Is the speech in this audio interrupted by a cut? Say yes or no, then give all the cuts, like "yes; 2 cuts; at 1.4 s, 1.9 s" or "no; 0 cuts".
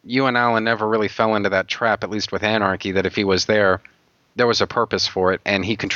no; 0 cuts